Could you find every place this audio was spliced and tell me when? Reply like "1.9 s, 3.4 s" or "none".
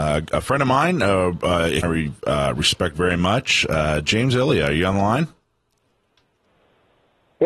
1.8 s